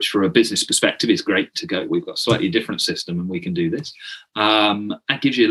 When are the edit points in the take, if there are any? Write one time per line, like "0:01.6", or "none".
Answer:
0:01.9